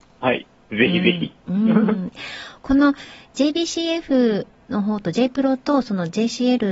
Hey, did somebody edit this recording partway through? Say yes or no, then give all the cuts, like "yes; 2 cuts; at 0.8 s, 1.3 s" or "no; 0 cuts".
no; 0 cuts